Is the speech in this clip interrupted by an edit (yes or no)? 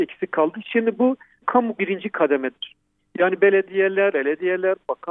yes